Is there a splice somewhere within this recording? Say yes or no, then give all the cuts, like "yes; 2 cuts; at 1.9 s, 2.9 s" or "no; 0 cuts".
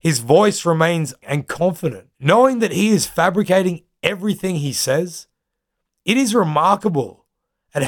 yes; 2 cuts; at 1.2 s, 2.1 s